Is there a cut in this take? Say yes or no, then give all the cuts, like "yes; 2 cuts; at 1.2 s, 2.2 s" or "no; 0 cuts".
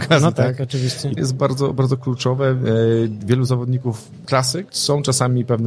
yes; 2 cuts; at 1.2 s, 4.2 s